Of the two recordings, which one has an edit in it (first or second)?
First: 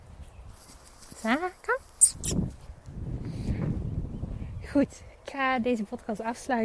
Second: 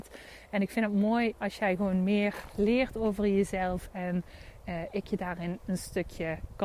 first